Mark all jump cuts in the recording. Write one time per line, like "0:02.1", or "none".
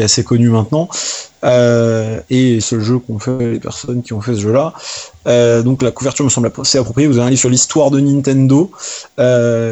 0:02.6